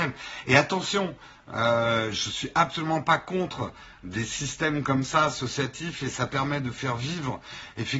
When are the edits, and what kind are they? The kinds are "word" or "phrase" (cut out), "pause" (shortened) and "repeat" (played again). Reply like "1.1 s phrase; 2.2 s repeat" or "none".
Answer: none